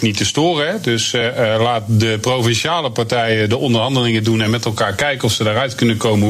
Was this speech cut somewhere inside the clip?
no; 0 cuts

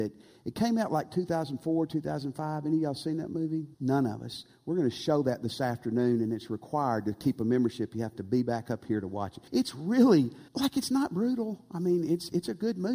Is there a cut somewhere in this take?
yes; 3 cuts; at 3.7 s, 9.5 s, 10.5 s

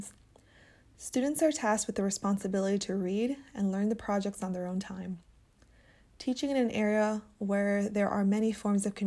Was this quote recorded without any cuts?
yes; 0 cuts

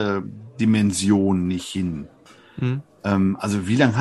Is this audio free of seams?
yes; 0 cuts

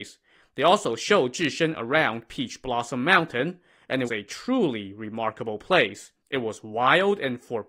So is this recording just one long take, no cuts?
no; 2 cuts; at 4.1 s, 6.2 s

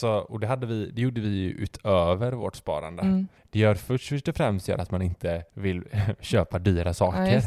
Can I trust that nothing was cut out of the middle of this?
no; 2 cuts; at 3.4 s, 5.5 s

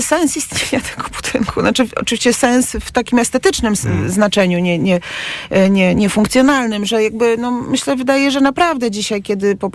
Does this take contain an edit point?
no; 0 cuts

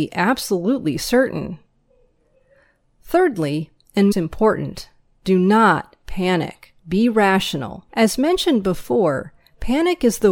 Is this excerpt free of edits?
no; 3 cuts; at 4.1 s, 6.8 s, 7.9 s

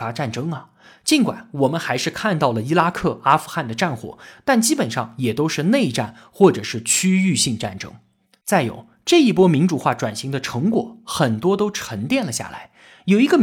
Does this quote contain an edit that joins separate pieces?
no; 0 cuts

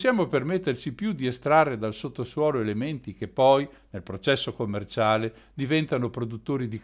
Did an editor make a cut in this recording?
no; 0 cuts

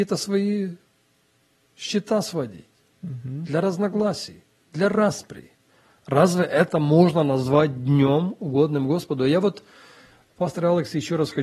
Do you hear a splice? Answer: no; 0 cuts

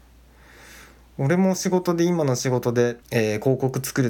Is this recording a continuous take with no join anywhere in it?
no; 1 cut; at 3.0 s

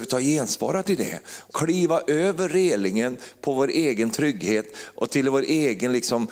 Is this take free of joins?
no; 1 cut; at 1.5 s

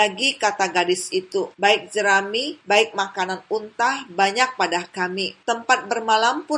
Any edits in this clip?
no; 0 cuts

